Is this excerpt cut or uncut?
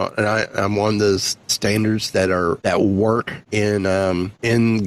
uncut